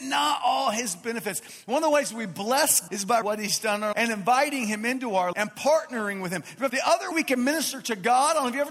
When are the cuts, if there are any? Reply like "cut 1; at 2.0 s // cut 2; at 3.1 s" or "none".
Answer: cut 1; at 2.9 s // cut 2; at 3.2 s // cut 3; at 3.9 s // cut 4; at 5.3 s // cut 5; at 6.7 s // cut 6; at 7.1 s